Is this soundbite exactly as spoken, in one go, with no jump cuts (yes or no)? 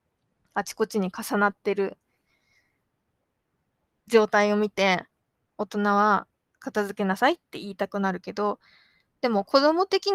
yes